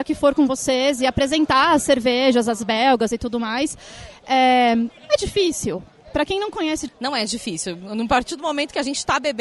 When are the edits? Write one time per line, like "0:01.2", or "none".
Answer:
0:05.0
0:06.9